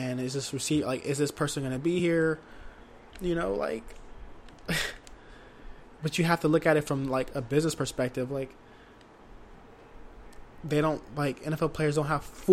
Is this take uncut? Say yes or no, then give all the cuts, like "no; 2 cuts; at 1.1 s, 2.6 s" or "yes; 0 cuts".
yes; 0 cuts